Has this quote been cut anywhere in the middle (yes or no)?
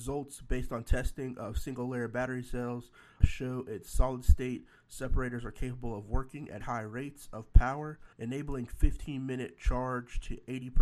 yes